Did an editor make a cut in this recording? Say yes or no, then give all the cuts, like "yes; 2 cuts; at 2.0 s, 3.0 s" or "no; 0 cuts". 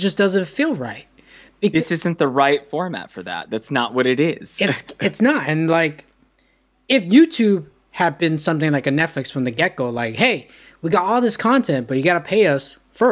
no; 0 cuts